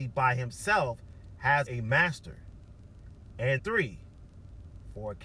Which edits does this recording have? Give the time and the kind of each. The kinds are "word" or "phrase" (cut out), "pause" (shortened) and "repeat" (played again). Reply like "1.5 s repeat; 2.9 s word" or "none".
1.7 s phrase; 3.6 s word